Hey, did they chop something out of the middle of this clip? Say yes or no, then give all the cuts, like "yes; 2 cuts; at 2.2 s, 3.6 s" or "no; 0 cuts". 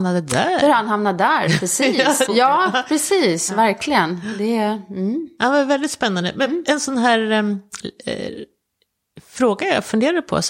yes; 1 cut; at 2.3 s